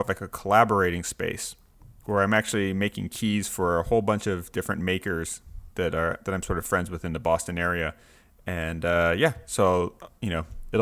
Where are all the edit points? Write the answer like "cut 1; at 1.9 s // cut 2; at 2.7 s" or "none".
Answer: none